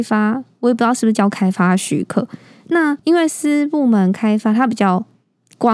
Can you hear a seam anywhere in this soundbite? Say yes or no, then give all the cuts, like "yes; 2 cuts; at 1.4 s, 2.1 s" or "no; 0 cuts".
yes; 1 cut; at 3.0 s